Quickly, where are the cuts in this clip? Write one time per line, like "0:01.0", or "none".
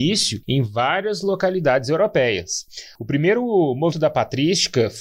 0:03.9